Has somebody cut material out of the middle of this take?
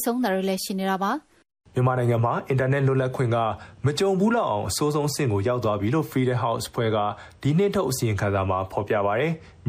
no; 0 cuts

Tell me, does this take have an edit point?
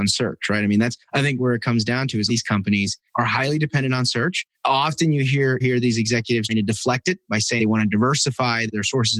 yes; 8 cuts; at 1.0 s, 1.4 s, 2.3 s, 3.1 s, 4.5 s, 5.6 s, 6.5 s, 7.6 s

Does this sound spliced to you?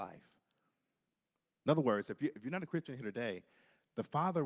no; 0 cuts

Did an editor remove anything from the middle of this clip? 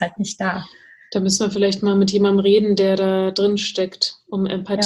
no; 0 cuts

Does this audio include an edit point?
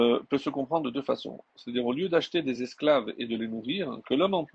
no; 0 cuts

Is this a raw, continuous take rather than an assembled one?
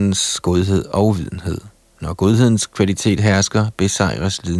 yes; 0 cuts

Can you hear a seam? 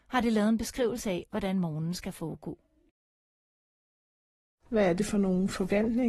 no; 0 cuts

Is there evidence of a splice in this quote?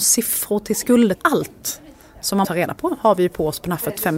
yes; 2 cuts; at 1.1 s, 2.4 s

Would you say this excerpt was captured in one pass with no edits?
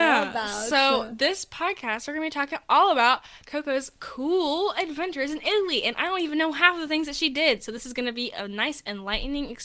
yes; 0 cuts

